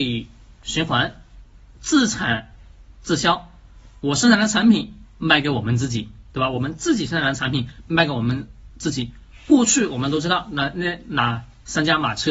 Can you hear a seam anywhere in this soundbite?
no; 0 cuts

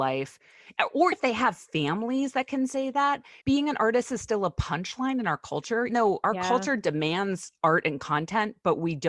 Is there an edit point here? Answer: yes; 3 cuts; at 1.1 s, 3.4 s, 5.9 s

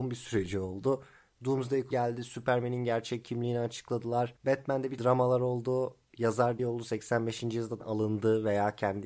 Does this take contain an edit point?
yes; 5 cuts; at 1.9 s, 4.4 s, 5.0 s, 6.6 s, 7.8 s

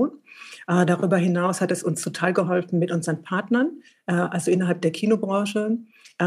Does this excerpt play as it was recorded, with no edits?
yes; 0 cuts

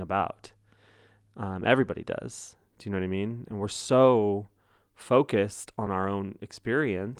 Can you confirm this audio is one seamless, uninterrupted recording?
yes; 0 cuts

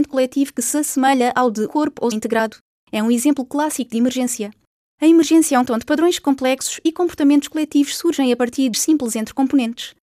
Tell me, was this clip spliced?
yes; 4 cuts; at 1.7 s, 2.1 s, 5.7 s, 8.7 s

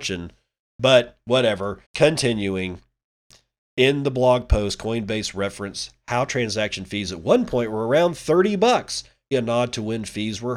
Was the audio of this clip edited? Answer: yes; 2 cuts; at 1.8 s, 9.3 s

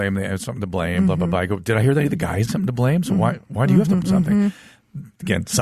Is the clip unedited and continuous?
no; 2 cuts; at 2.5 s, 4.0 s

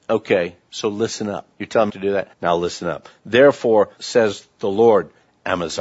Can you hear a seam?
yes; 4 cuts; at 1.5 s, 1.9 s, 2.3 s, 4.0 s

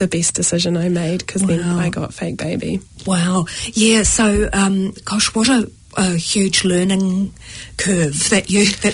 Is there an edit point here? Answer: no; 0 cuts

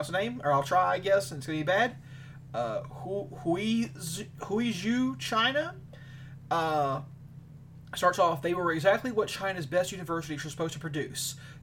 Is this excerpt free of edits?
yes; 0 cuts

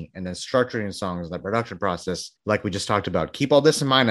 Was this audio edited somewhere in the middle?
yes; 1 cut; at 2.4 s

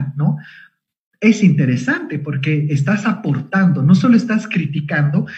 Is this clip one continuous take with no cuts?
yes; 0 cuts

